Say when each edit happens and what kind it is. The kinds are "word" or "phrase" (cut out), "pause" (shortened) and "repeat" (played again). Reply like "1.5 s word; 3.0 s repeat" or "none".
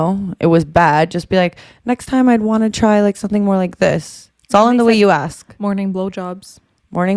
none